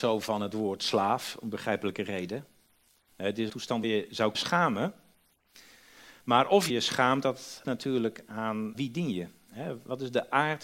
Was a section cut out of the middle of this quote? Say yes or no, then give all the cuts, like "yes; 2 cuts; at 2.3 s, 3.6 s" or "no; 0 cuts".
yes; 6 cuts; at 3.5 s, 3.8 s, 4.3 s, 6.7 s, 7.6 s, 8.7 s